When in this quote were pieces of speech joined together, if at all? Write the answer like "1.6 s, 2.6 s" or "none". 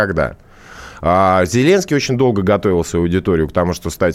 none